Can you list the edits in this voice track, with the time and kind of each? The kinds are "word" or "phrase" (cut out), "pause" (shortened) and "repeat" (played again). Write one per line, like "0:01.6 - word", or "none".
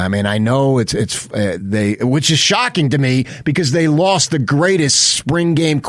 0:01.6 - word